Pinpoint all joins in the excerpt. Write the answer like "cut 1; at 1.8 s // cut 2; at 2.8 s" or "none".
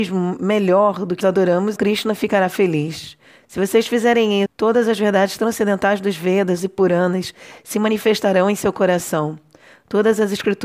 cut 1; at 1.2 s // cut 2; at 1.8 s // cut 3; at 4.5 s // cut 4; at 6.6 s